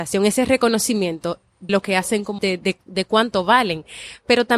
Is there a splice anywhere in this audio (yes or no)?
yes